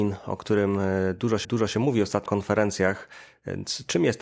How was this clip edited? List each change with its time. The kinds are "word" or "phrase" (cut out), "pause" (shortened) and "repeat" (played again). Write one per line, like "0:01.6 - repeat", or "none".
0:01.4 - repeat
0:02.3 - word